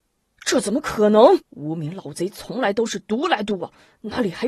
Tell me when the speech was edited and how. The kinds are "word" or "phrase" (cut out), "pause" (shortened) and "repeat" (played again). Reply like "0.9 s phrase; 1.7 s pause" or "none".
1.4 s pause